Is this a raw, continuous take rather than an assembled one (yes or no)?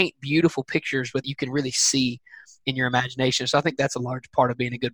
no